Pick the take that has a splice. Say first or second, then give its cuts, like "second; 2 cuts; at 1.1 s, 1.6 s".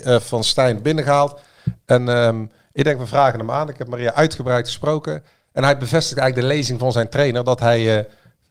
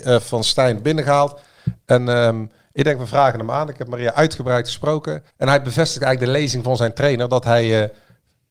second; 1 cut; at 5.3 s